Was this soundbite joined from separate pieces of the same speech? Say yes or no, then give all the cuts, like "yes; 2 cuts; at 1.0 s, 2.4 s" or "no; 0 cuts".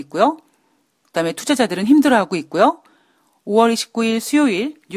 no; 0 cuts